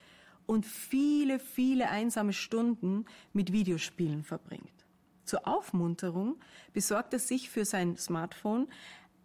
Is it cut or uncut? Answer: uncut